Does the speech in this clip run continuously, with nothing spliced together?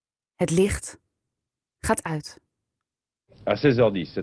yes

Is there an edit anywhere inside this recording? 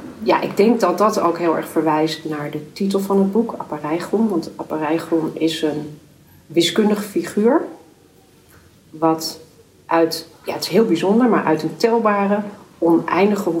yes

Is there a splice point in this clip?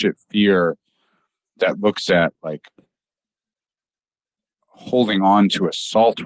no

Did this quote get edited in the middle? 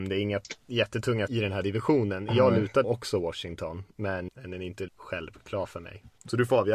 yes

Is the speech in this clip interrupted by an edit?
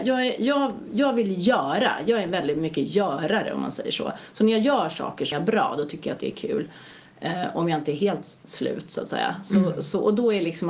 yes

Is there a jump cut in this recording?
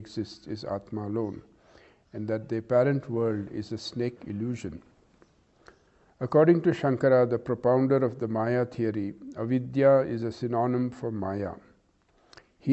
yes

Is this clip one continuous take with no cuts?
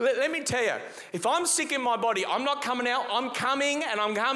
yes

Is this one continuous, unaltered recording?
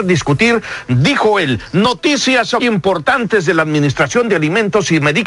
no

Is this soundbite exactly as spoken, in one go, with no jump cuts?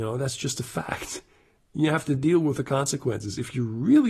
yes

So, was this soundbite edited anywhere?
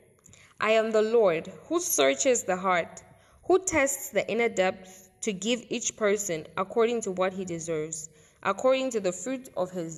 no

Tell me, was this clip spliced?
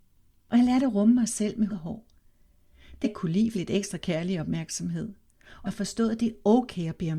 yes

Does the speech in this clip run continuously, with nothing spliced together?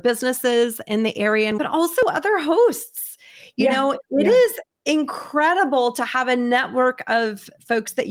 no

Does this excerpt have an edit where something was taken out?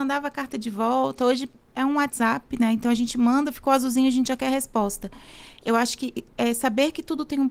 no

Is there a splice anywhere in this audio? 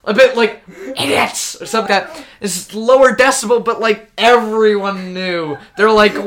yes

